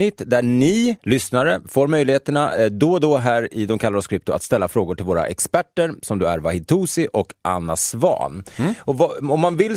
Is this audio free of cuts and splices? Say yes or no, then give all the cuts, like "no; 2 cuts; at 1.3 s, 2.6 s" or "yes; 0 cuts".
no; 1 cut; at 1.0 s